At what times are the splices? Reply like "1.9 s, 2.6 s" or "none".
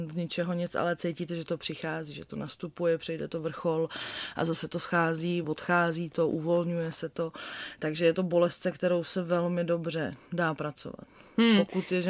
5.4 s